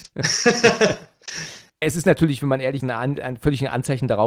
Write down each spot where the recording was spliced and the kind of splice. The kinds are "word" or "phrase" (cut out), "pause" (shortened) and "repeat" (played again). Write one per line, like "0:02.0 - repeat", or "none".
0:01.8 - word
0:02.8 - word